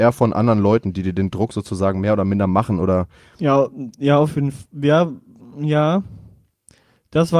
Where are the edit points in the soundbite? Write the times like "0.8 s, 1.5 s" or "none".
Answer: none